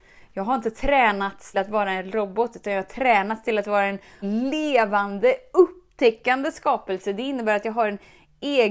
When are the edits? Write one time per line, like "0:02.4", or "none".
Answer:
0:01.5
0:04.2